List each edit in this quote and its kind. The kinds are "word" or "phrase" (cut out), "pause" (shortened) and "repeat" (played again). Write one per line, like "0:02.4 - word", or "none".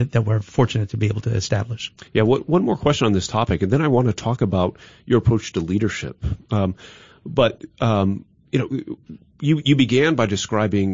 0:02.1 - pause